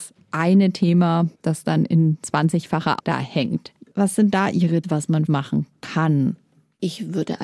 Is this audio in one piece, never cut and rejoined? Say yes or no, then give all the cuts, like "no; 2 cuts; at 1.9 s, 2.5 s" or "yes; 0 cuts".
no; 4 cuts; at 1.4 s, 3.0 s, 4.8 s, 5.3 s